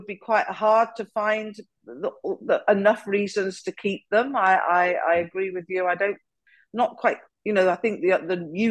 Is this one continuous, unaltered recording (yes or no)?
yes